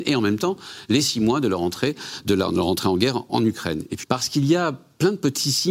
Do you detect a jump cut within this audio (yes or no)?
yes